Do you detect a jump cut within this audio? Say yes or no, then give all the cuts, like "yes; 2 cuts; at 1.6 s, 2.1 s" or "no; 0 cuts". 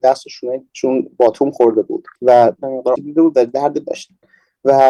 yes; 4 cuts; at 2.2 s, 2.6 s, 3.0 s, 3.8 s